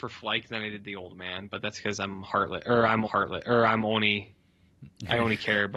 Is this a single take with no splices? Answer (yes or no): no